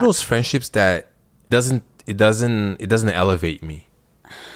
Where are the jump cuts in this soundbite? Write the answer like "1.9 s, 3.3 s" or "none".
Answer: 1.5 s